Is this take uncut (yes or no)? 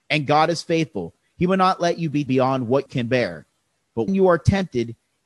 no